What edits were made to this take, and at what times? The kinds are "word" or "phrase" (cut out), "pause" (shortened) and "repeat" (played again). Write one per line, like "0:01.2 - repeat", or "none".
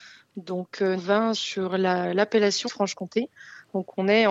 0:01.0 - word
0:01.3 - word
0:02.6 - phrase